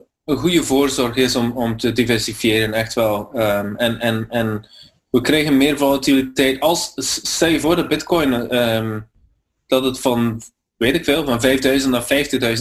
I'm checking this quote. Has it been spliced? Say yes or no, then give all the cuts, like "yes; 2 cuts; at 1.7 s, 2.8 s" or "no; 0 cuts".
no; 0 cuts